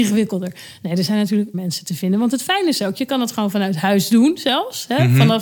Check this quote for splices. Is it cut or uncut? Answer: cut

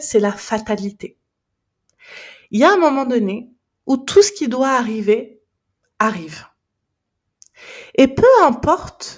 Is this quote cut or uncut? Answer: uncut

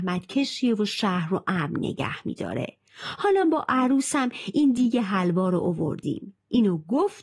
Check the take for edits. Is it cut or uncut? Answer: uncut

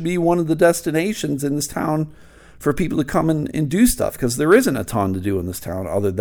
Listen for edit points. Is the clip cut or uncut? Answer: uncut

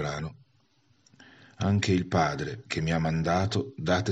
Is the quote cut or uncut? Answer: uncut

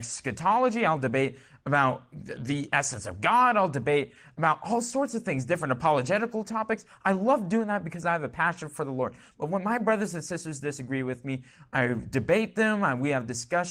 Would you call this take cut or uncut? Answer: uncut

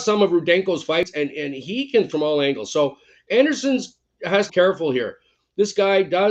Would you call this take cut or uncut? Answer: cut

